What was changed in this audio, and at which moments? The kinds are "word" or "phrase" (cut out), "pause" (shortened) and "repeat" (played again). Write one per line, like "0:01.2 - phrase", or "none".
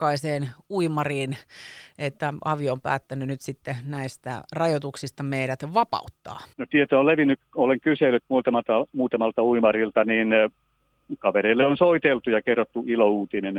0:06.5 - pause